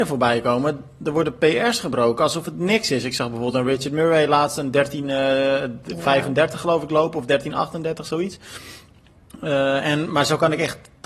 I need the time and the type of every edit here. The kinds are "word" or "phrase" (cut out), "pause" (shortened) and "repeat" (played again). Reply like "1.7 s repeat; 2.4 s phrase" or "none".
none